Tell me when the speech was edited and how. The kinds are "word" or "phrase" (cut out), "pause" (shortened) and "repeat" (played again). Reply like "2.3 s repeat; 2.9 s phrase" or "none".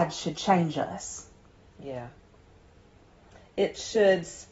none